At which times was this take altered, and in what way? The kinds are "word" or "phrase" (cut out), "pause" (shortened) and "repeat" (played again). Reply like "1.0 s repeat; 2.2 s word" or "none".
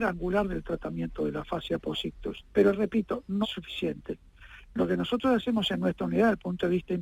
2.5 s pause; 3.4 s word